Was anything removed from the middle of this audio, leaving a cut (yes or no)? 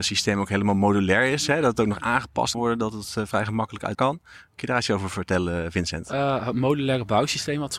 yes